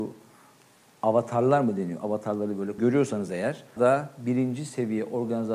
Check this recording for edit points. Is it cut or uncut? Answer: cut